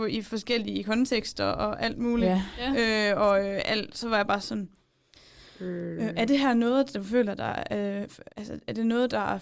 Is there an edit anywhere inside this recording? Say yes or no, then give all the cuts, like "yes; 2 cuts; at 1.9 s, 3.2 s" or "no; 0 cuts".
yes; 1 cut; at 8.3 s